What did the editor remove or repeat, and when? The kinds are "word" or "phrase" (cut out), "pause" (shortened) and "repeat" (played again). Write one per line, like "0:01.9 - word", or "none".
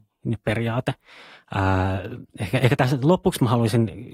0:02.3 - pause